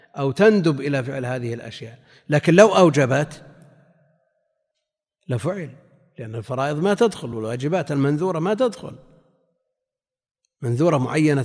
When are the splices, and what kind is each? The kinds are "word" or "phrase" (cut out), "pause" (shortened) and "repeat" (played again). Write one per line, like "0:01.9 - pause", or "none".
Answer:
none